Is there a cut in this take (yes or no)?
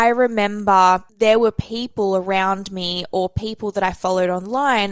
no